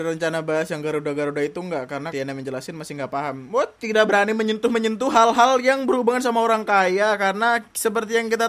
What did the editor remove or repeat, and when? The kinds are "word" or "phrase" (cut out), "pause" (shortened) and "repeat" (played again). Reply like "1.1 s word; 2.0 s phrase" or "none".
2.1 s phrase